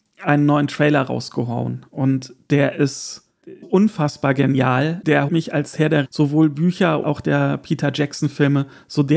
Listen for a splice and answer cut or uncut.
cut